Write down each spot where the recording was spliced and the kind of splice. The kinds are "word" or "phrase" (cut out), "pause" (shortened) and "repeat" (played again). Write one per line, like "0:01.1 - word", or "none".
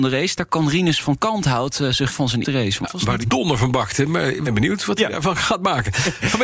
0:02.1 - word
0:02.4 - word
0:02.8 - word
0:03.2 - word
0:04.5 - word